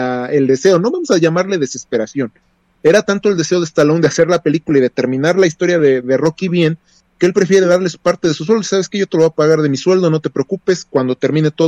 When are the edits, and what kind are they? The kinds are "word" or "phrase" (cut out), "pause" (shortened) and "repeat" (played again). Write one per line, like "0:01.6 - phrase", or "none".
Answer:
none

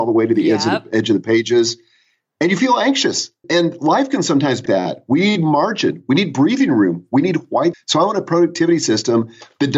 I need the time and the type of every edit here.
0:03.4 - word
0:04.7 - word
0:07.7 - word

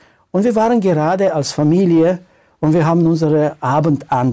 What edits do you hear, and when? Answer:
none

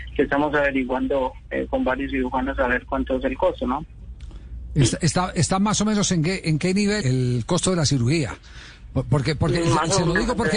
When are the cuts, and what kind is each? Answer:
0:07.0 - word

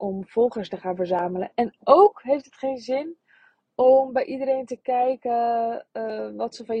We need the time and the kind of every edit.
none

